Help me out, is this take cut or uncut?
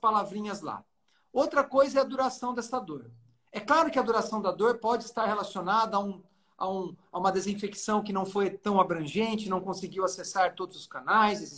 uncut